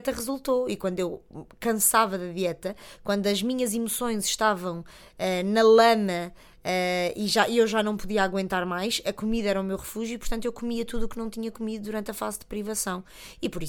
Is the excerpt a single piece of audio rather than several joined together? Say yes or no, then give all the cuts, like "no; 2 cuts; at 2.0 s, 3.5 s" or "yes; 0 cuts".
yes; 0 cuts